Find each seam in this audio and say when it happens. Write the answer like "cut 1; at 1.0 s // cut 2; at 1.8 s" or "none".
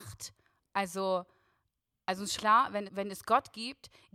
cut 1; at 2.4 s // cut 2; at 2.9 s